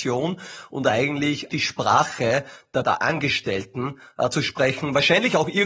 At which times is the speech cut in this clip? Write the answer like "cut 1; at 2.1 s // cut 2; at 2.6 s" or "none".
cut 1; at 1.5 s // cut 2; at 2.8 s